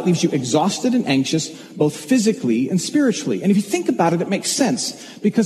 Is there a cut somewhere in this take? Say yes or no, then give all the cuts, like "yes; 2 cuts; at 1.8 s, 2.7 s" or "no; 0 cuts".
no; 0 cuts